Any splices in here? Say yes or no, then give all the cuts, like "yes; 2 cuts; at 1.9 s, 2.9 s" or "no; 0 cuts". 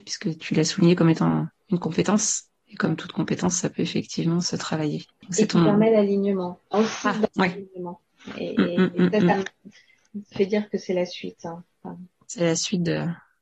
yes; 3 cuts; at 4.4 s, 6.7 s, 10.3 s